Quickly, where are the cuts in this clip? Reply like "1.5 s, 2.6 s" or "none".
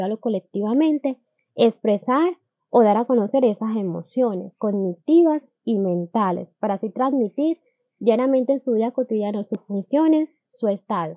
none